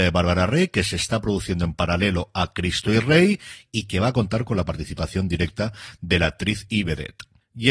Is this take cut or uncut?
uncut